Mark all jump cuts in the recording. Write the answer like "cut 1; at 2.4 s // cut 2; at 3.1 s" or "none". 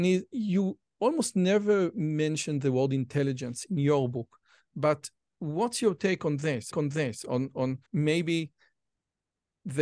cut 1; at 6.7 s // cut 2; at 7.9 s